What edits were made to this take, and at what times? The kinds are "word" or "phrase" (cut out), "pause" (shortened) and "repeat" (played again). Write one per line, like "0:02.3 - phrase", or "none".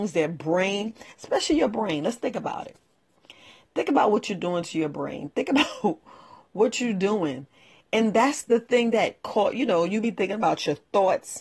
none